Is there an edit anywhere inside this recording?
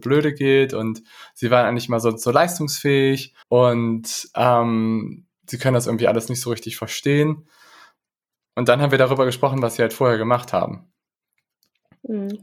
yes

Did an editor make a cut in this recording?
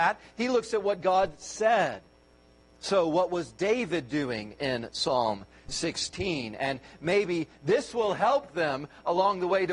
no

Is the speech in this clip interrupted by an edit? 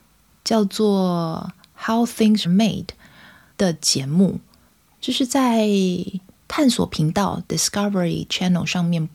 yes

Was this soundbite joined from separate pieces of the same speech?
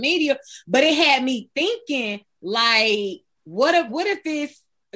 yes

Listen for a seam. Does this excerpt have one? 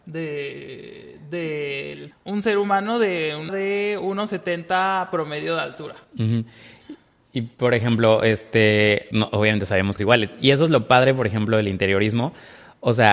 yes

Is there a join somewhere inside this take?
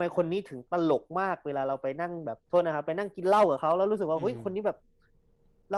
yes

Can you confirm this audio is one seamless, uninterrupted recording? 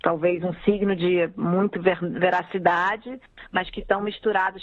yes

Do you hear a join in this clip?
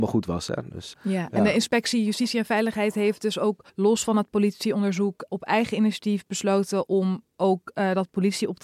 yes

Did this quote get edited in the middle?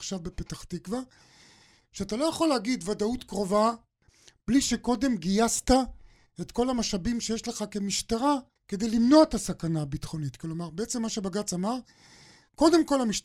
yes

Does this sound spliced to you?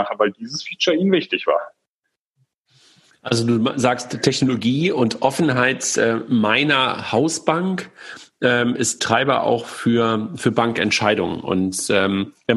no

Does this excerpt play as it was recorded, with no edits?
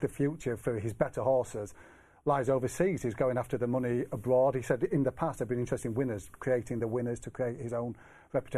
yes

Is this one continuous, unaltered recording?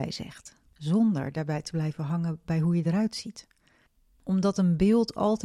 yes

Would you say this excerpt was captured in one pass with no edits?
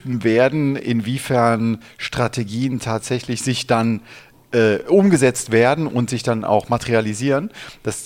yes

